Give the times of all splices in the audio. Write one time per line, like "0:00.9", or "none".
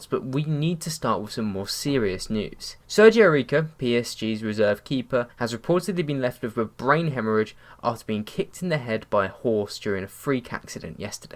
0:02.8
0:05.3